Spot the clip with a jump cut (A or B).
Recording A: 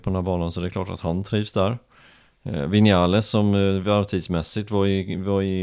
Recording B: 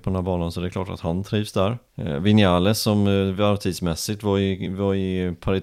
B